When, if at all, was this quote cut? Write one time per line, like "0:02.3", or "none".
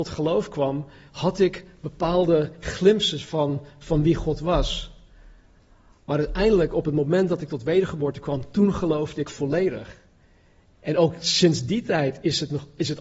none